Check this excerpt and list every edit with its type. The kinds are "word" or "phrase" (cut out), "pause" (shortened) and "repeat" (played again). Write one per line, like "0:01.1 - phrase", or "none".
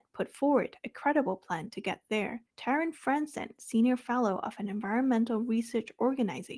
0:02.5 - pause

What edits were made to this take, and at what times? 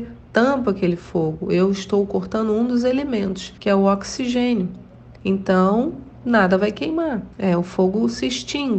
0:03.6 - pause
0:05.2 - pause
0:07.3 - pause

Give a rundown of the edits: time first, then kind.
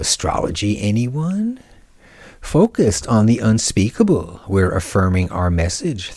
none

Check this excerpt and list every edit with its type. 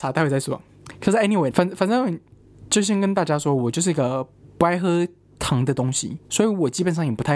0:01.5 - word

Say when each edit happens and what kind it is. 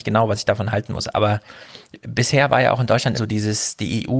0:03.1 - word

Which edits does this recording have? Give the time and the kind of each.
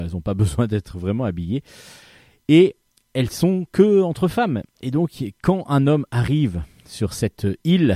0:02.9 - pause

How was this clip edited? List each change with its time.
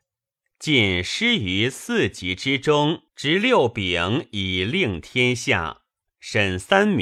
0:03.1 - pause

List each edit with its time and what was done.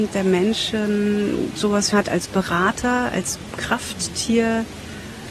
0:01.9 - phrase

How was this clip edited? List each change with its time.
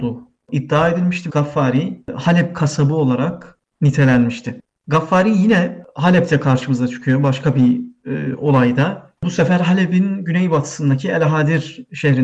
0:01.3 - phrase
0:09.2 - pause

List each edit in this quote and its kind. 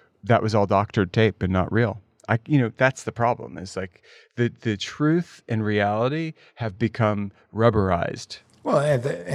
none

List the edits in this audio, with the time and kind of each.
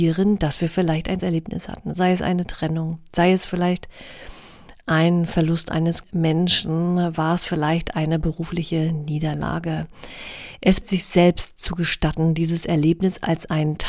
0:01.2 - word
0:06.0 - word
0:10.8 - word

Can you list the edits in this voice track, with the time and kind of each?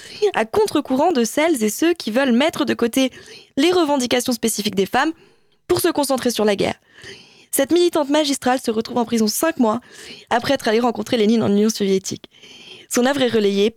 none

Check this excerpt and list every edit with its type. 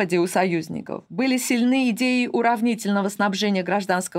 none

